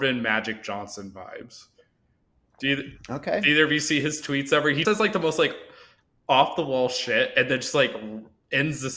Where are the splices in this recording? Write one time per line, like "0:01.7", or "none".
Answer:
0:04.8